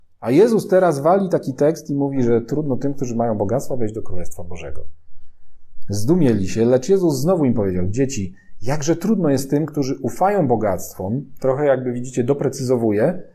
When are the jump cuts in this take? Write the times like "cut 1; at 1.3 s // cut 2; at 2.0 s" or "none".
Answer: none